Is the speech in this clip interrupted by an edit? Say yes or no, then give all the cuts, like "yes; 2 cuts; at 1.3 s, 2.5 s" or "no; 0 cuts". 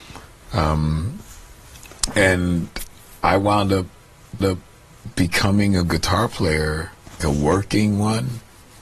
yes; 2 cuts; at 4.4 s, 7.2 s